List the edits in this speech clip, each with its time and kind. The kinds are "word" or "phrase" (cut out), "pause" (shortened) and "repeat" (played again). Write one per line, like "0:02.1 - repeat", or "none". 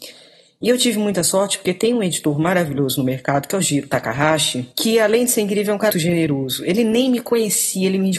0:04.7 - pause
0:05.9 - word